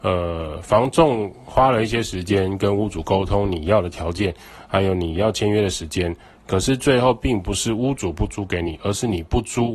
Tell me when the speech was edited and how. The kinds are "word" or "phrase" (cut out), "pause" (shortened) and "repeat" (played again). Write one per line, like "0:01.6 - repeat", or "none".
none